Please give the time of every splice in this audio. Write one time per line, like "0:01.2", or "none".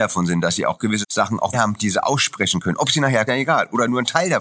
0:01.0
0:01.5
0:03.3